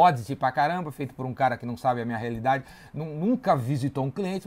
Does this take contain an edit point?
no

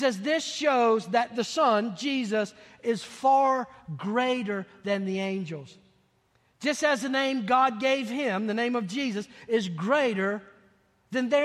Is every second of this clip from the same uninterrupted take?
yes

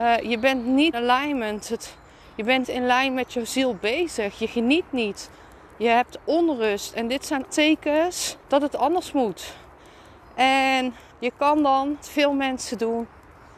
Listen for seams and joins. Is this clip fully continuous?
no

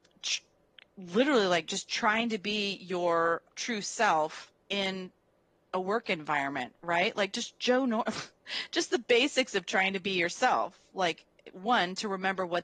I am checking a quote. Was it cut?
yes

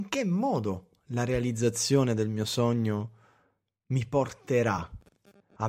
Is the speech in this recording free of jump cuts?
yes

